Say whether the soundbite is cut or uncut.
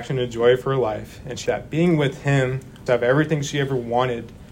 cut